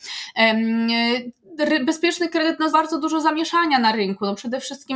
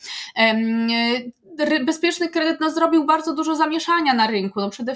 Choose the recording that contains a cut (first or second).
first